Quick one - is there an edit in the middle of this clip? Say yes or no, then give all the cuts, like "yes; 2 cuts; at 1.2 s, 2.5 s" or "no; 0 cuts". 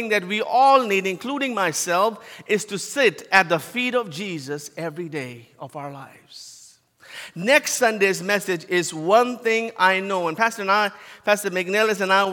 no; 0 cuts